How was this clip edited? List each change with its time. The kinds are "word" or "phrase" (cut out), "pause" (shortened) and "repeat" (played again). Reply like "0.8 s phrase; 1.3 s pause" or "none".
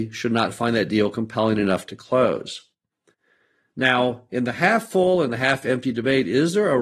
none